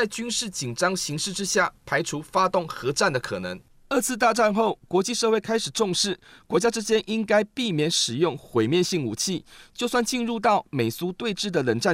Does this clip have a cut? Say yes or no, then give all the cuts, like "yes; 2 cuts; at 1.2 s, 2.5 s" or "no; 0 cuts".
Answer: no; 0 cuts